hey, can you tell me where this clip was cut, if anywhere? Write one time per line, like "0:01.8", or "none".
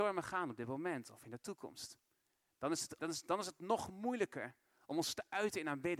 0:03.0